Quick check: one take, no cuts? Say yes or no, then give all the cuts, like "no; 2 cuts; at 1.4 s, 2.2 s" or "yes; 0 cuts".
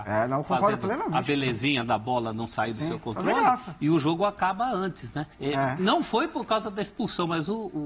no; 1 cut; at 5.3 s